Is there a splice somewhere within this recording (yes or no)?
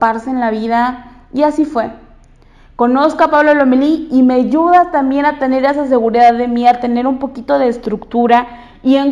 no